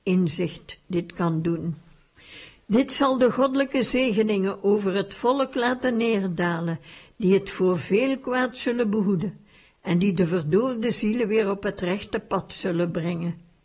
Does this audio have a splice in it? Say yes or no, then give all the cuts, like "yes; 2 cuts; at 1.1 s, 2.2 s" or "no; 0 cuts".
no; 0 cuts